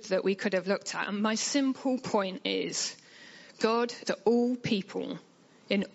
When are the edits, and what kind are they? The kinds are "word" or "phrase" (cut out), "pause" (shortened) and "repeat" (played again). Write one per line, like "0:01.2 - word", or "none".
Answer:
0:04.0 - word